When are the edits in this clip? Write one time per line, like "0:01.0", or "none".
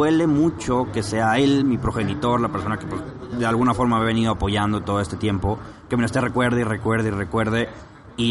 none